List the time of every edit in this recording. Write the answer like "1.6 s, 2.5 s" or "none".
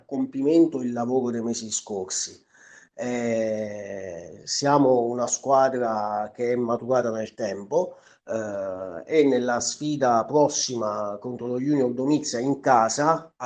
none